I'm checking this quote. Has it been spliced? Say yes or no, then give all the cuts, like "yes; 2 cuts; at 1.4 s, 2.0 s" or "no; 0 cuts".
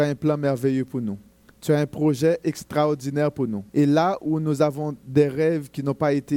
yes; 2 cuts; at 1.3 s, 3.7 s